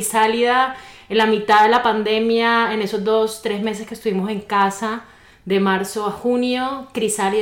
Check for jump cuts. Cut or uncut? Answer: uncut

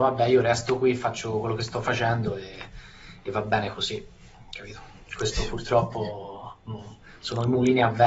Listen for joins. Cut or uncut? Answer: uncut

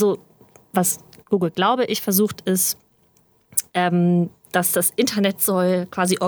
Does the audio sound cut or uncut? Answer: uncut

